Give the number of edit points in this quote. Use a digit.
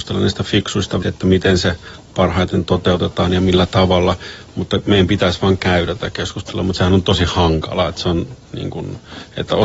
1